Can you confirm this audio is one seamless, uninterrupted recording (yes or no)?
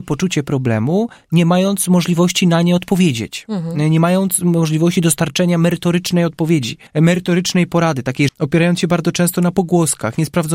no